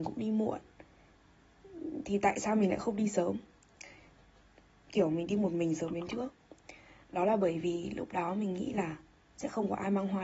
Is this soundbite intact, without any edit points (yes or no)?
yes